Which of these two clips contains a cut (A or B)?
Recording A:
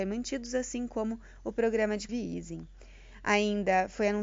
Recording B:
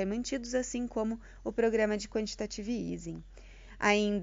A